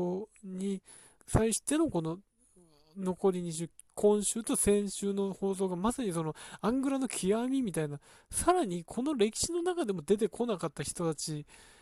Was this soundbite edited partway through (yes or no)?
yes